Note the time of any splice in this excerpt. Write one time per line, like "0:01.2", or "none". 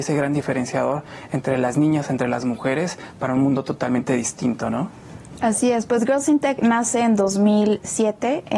none